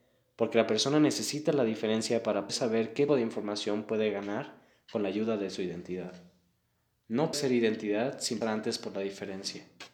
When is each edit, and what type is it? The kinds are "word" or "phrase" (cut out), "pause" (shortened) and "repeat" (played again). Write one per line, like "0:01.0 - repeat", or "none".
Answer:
0:02.5 - word
0:03.1 - word
0:07.3 - word
0:08.4 - word

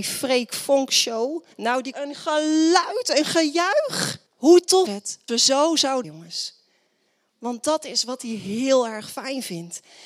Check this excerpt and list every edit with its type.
0:01.5 - pause
0:01.9 - phrase
0:04.3 - pause
0:04.9 - word
0:05.3 - word
0:06.0 - phrase

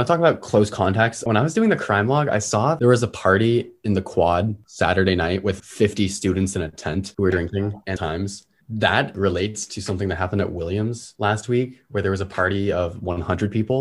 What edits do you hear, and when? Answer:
0:08.0 - phrase

